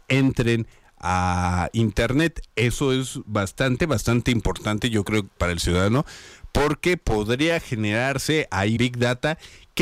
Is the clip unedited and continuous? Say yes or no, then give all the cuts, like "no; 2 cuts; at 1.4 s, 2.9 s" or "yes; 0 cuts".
no; 3 cuts; at 3.8 s, 5.4 s, 8.8 s